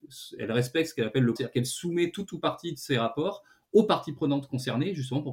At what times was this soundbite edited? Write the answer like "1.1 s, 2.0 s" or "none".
1.4 s